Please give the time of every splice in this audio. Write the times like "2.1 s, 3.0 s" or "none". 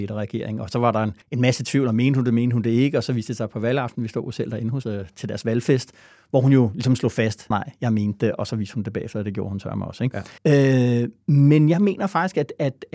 1.2 s, 4.8 s, 7.5 s, 10.4 s